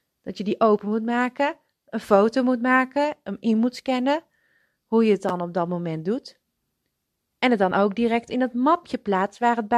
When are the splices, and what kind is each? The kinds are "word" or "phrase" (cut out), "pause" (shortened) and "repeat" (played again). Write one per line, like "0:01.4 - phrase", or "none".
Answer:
none